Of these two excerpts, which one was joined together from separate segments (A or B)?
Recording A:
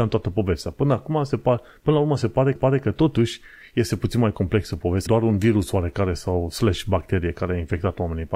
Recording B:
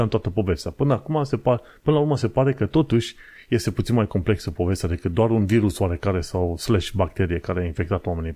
A